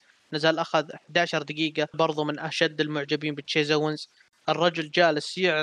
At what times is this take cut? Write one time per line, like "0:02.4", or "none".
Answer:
0:01.9